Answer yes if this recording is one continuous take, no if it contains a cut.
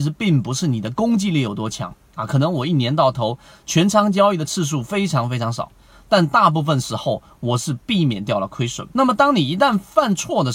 no